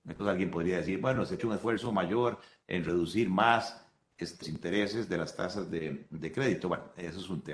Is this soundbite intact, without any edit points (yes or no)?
no